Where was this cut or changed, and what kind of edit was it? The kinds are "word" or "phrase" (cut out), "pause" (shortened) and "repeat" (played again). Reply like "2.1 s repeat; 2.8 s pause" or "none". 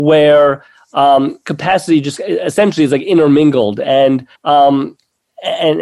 4.4 s pause